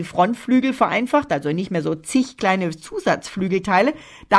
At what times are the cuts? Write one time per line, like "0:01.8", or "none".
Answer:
none